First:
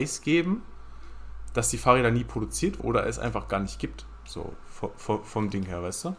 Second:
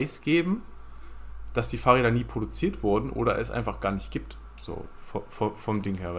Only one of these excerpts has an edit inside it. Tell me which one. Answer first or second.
first